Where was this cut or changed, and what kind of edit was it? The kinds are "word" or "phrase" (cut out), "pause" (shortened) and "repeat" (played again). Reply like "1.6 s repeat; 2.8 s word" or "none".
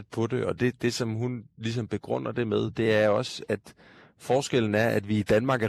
none